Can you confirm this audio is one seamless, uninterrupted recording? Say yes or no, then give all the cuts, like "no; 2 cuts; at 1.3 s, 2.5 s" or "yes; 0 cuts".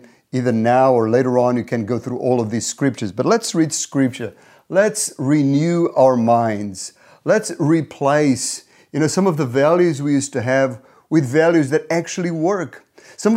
yes; 0 cuts